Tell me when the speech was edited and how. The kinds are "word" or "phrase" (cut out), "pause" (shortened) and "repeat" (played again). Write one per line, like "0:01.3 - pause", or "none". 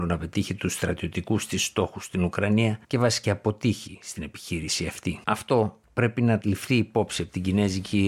0:02.8 - pause
0:03.2 - word
0:05.2 - pause